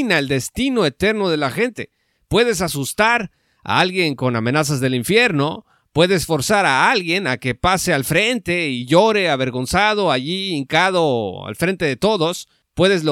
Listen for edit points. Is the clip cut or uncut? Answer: uncut